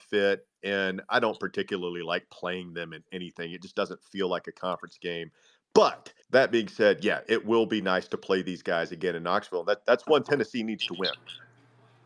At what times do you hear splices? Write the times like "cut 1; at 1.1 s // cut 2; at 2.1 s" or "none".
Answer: cut 1; at 6.2 s